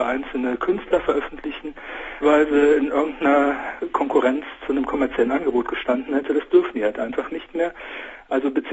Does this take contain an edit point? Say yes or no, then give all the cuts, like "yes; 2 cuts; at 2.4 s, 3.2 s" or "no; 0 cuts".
yes; 1 cut; at 2.2 s